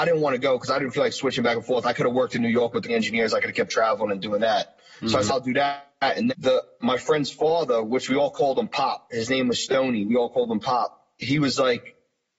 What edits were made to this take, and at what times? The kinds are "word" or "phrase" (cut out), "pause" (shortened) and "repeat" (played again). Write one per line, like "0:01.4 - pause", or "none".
0:02.9 - word
0:05.3 - word
0:06.3 - word

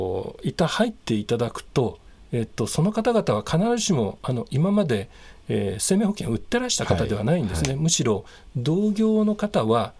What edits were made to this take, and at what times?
none

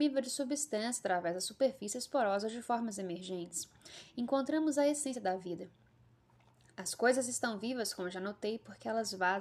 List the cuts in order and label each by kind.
none

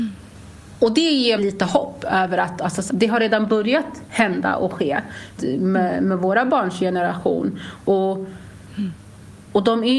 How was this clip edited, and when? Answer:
0:01.4 - word
0:02.9 - word
0:05.4 - word

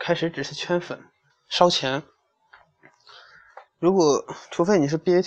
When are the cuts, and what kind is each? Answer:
0:01.3 - pause
0:03.7 - pause

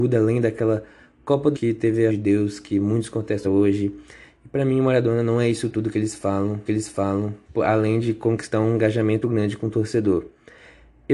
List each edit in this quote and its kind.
0:01.5 - word
0:02.1 - phrase
0:03.4 - word
0:06.7 - repeat
0:09.2 - word

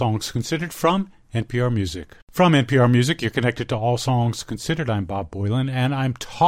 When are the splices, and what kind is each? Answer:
0:02.2 - pause

